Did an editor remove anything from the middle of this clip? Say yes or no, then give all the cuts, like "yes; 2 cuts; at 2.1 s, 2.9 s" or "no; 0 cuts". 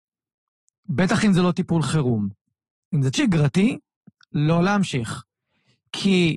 yes; 1 cut; at 3.1 s